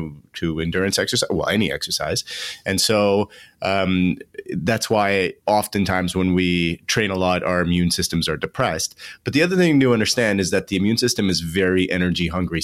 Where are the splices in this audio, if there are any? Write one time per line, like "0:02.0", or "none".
none